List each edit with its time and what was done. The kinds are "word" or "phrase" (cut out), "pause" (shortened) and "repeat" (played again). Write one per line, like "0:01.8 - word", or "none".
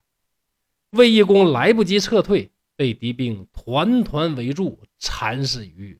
none